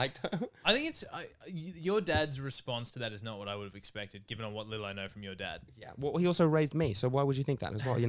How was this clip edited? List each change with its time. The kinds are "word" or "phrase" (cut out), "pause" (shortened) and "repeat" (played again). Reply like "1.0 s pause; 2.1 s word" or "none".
none